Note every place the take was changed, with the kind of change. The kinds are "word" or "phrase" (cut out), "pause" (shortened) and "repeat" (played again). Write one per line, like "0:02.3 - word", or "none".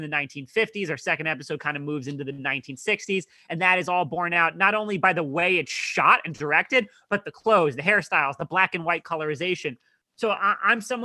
none